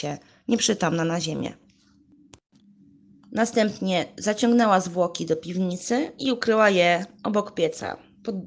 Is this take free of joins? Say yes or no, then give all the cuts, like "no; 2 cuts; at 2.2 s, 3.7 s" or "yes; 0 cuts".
yes; 0 cuts